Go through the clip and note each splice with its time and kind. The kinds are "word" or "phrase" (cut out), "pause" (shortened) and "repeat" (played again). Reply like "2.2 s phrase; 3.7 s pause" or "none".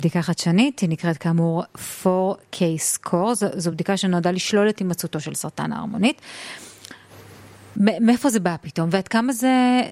none